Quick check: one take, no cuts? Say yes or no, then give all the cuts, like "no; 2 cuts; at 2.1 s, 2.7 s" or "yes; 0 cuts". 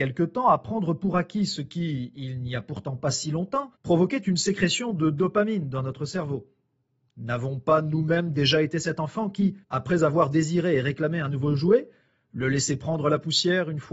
no; 2 cuts; at 3.8 s, 9.6 s